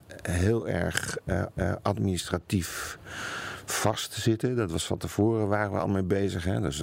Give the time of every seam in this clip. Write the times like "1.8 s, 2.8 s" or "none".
1.5 s

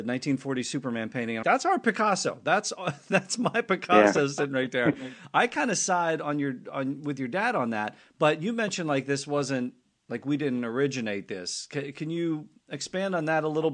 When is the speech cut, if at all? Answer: 1.4 s

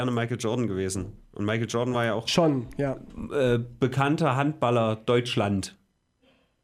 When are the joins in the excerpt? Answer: none

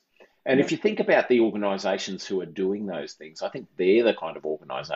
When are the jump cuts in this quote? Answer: none

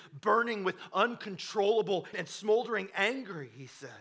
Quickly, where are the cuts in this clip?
2.1 s

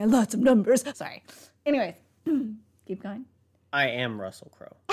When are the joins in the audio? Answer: 0.9 s

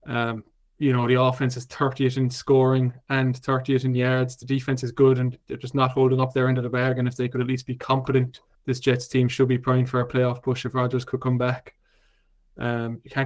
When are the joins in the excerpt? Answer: 8.5 s

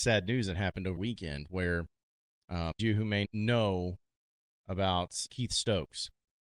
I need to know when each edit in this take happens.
1.0 s, 2.8 s, 3.3 s, 5.3 s

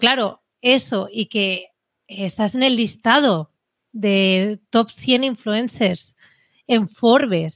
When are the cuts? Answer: none

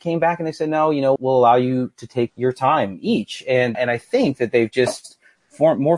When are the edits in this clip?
1.2 s, 2.3 s, 3.7 s

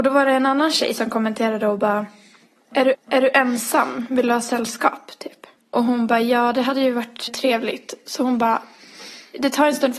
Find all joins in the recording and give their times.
2.9 s, 5.5 s, 7.3 s

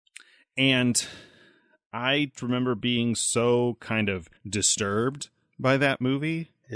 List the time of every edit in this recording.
2.3 s, 4.4 s

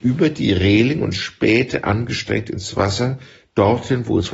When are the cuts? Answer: none

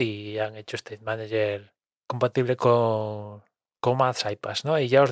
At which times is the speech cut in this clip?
none

